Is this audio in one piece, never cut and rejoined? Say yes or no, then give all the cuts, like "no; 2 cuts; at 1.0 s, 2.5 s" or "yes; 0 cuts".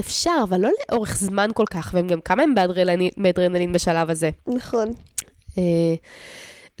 no; 1 cut; at 4.4 s